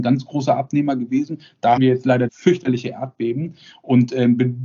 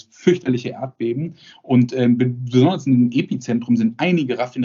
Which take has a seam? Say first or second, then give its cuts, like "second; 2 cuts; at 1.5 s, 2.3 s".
first; 2 cuts; at 1.8 s, 2.3 s